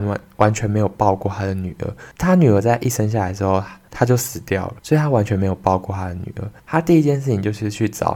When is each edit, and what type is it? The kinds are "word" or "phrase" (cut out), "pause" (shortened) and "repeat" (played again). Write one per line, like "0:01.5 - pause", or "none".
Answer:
0:04.8 - pause
0:06.6 - pause